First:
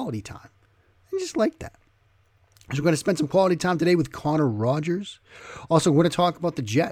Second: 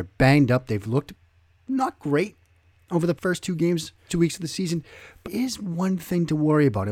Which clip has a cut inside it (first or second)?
second